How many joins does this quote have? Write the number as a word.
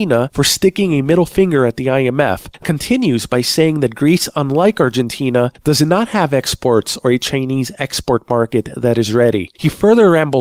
one